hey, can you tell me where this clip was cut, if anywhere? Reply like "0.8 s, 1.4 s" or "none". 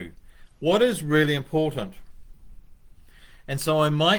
none

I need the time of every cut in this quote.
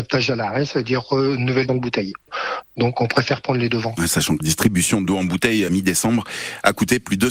1.7 s, 4.4 s, 5.7 s

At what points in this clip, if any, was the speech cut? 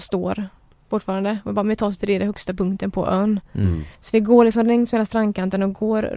2.0 s, 3.9 s

